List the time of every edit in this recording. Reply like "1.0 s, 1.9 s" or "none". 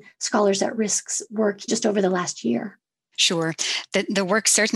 1.7 s